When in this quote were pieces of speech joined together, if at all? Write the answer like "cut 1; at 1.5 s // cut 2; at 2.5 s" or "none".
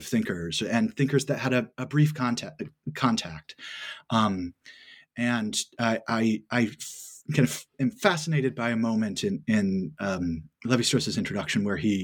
none